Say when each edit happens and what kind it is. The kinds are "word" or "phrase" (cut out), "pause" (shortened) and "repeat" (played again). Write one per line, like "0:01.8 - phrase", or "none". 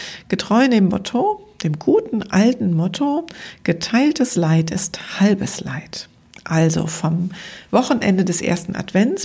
none